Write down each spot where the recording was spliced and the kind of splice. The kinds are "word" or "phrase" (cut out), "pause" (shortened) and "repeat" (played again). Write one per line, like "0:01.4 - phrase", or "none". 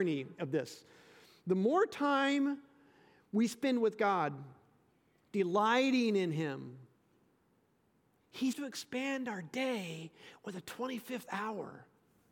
0:08.5 - word